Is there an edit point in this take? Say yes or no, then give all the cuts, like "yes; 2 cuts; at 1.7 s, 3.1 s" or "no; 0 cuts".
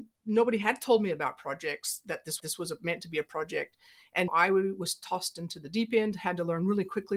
yes; 2 cuts; at 2.4 s, 4.3 s